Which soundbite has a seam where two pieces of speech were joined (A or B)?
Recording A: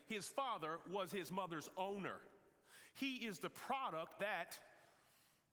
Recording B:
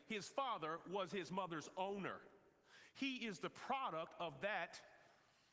A